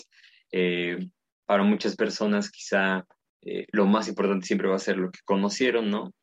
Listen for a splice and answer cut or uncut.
uncut